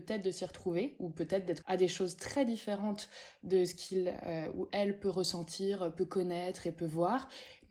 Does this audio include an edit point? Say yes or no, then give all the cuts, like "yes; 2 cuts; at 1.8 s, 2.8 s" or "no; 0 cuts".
yes; 1 cut; at 1.6 s